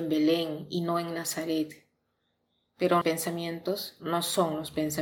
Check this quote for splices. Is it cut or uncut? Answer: cut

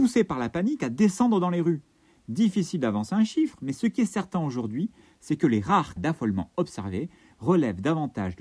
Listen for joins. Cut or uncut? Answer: cut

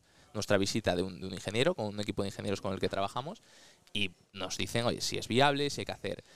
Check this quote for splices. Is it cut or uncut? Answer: uncut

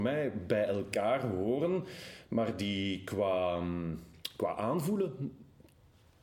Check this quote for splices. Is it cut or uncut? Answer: uncut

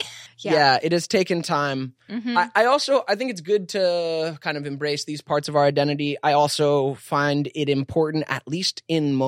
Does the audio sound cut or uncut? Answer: uncut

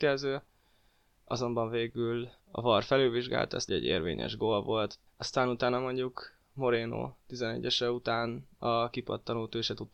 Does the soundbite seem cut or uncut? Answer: cut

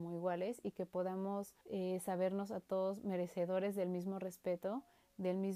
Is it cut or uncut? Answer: cut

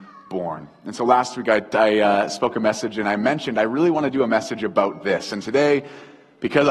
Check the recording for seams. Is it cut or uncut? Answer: uncut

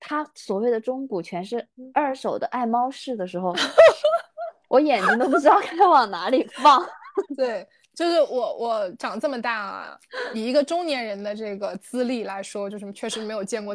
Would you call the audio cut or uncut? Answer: uncut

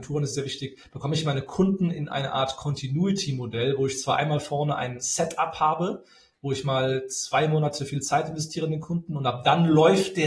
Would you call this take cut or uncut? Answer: uncut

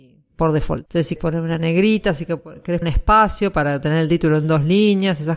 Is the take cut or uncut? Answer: cut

